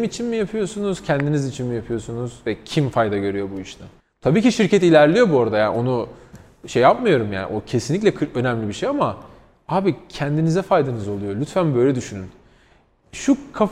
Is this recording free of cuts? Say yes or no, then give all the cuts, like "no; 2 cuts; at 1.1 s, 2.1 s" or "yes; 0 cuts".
no; 1 cut; at 4.0 s